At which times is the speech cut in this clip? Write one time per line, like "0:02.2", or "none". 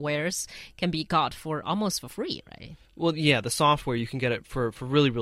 0:02.9